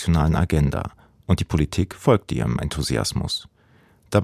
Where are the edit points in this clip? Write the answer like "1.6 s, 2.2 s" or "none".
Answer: none